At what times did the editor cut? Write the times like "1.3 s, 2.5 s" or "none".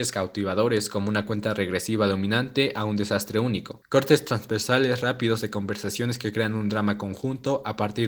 none